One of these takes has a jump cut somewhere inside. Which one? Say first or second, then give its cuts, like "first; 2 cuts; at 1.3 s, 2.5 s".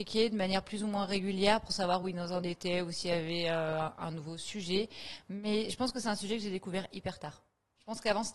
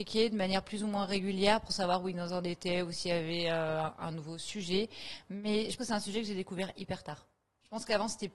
second; 1 cut; at 5.8 s